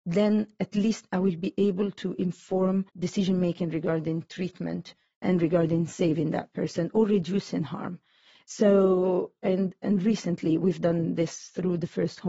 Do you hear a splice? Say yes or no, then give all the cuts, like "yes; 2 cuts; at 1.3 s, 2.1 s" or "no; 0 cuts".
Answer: yes; 1 cut; at 2.9 s